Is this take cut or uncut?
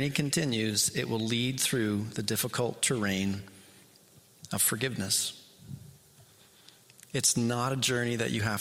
uncut